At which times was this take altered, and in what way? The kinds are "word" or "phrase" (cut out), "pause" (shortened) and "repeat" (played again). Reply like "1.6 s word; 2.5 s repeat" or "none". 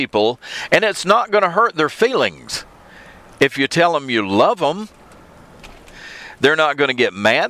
none

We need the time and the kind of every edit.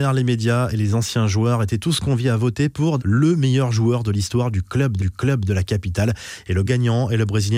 3.0 s word; 5.0 s repeat; 6.6 s word

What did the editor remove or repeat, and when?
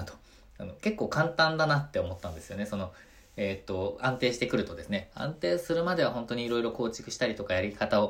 none

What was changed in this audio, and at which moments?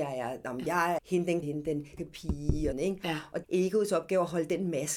1.0 s word; 1.4 s word; 2.0 s word; 2.7 s phrase; 3.4 s phrase

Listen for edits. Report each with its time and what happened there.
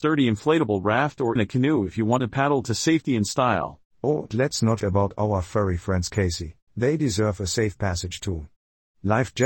1.4 s word; 4.3 s word; 4.8 s word; 6.7 s pause

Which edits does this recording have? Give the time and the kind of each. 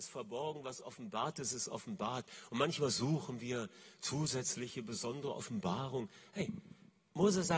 none

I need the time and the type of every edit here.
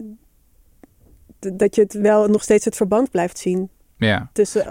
none

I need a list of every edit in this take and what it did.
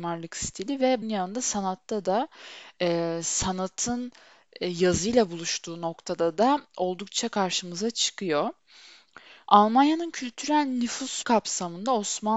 1.0 s word; 11.2 s word

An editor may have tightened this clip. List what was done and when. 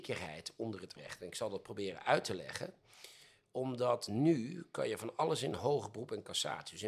1.0 s word

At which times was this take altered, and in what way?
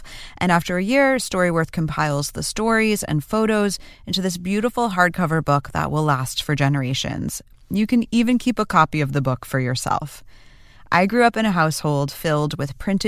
none

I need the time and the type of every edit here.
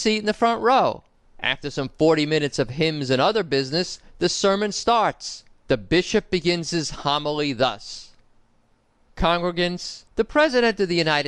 1.1 s pause; 5.5 s pause; 10.1 s pause

